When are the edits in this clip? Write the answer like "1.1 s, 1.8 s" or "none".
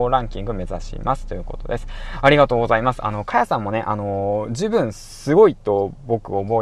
none